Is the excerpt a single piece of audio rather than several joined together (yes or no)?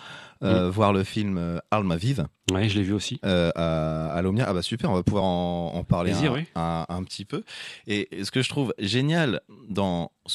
yes